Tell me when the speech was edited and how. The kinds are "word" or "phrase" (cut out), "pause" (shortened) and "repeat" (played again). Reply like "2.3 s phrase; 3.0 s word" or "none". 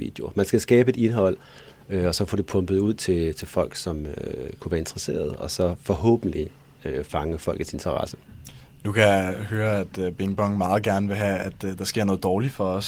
none